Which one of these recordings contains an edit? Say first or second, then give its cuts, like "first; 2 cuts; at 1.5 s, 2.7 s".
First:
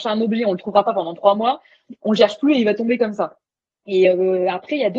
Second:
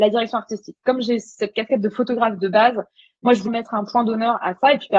second; 1 cut; at 3.5 s